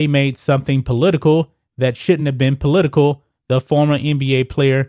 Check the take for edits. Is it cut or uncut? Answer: uncut